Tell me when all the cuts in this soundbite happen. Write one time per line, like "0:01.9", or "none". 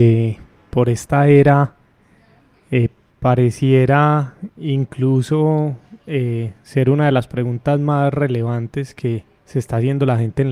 0:03.1
0:06.6
0:09.4